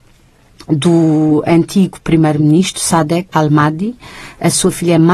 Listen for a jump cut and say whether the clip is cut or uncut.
cut